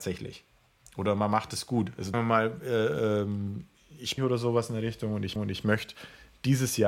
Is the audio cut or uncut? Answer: cut